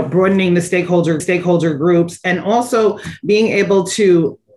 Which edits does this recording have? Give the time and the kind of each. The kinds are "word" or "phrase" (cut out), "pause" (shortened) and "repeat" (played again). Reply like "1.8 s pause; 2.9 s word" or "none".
1.2 s repeat